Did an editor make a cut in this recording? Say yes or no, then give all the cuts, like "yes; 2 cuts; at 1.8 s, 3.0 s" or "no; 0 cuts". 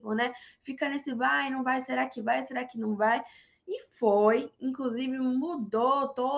no; 0 cuts